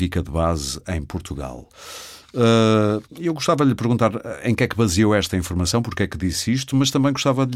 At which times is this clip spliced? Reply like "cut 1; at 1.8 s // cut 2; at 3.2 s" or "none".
cut 1; at 3.1 s